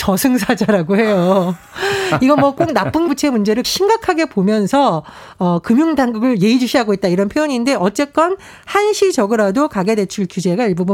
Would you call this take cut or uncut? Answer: cut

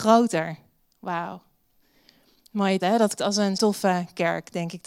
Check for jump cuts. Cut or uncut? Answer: cut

